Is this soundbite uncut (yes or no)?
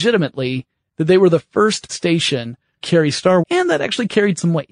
no